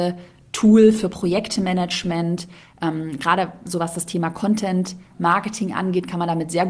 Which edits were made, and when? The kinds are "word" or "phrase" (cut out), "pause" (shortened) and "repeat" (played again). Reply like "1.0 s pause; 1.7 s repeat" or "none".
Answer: none